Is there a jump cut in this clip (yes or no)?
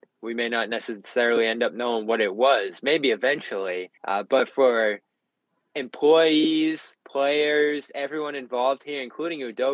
yes